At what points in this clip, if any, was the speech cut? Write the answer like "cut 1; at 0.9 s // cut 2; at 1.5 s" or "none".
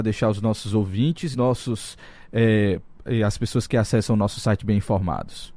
cut 1; at 1.3 s